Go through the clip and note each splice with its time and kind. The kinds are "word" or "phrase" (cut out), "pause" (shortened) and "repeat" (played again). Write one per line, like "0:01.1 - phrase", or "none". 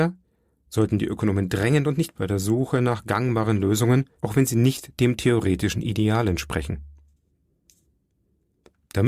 0:02.2 - word
0:04.2 - pause